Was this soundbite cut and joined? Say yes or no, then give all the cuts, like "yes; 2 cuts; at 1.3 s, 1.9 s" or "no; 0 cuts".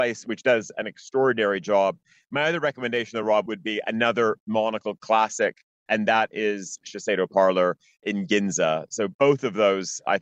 no; 0 cuts